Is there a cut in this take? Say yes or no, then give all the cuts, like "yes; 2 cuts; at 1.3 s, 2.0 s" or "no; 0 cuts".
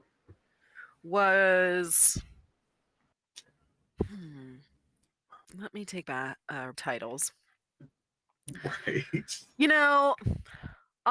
yes; 3 cuts; at 5.4 s, 6.0 s, 6.7 s